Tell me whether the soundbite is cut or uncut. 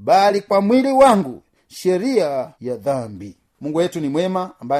cut